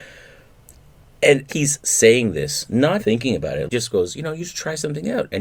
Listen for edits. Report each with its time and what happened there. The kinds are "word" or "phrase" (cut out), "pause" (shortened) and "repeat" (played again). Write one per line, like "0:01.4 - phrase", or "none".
0:01.5 - word
0:03.0 - word
0:03.7 - word